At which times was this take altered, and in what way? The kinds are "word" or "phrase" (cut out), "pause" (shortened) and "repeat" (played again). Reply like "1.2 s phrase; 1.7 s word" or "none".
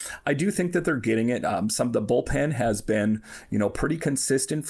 none